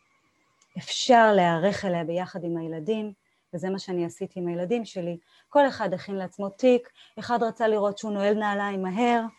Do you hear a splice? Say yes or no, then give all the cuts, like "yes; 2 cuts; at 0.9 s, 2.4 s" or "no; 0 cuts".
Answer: no; 0 cuts